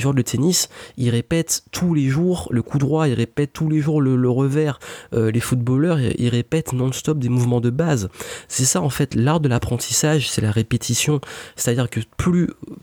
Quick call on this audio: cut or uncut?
uncut